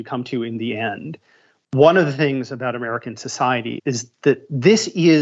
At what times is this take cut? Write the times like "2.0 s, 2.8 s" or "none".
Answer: 3.8 s